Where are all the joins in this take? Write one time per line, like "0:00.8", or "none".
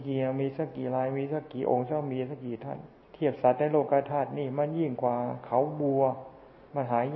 0:03.0